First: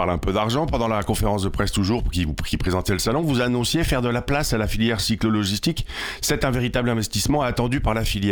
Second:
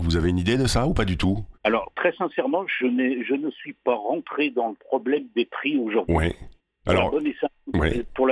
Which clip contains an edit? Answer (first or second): second